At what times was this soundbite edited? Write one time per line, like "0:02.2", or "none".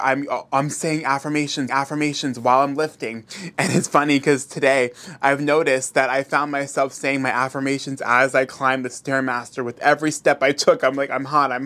0:01.7